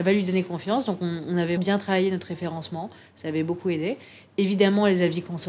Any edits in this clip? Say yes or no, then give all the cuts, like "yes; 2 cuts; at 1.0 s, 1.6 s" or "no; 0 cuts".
yes; 1 cut; at 1.6 s